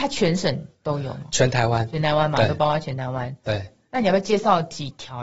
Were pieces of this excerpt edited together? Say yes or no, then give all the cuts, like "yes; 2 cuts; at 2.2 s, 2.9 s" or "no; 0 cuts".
no; 0 cuts